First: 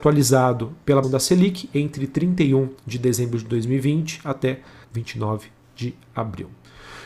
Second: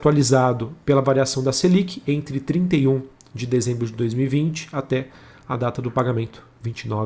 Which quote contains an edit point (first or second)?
first